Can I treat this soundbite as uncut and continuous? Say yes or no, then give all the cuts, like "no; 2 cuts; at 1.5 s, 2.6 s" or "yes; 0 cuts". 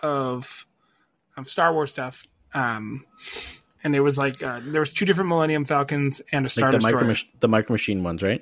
yes; 0 cuts